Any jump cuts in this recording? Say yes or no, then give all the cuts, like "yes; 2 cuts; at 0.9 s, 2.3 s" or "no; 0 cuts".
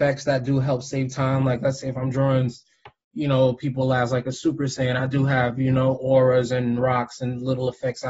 no; 0 cuts